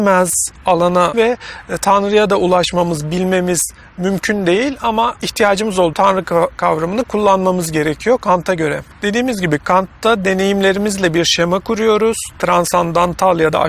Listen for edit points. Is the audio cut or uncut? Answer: cut